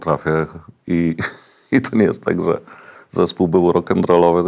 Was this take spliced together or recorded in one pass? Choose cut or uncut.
uncut